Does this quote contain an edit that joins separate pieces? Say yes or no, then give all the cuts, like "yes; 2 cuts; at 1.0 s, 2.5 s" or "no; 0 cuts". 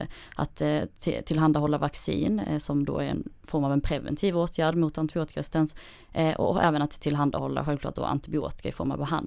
no; 0 cuts